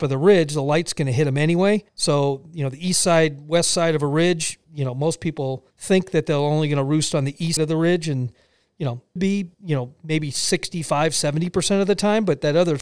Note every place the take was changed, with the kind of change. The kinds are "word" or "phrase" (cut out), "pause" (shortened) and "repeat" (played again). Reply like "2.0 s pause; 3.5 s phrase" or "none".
1.9 s pause; 4.6 s pause; 5.7 s pause; 7.6 s word; 9.2 s phrase; 9.5 s pause